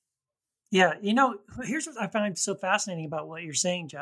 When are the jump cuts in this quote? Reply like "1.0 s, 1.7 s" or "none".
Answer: none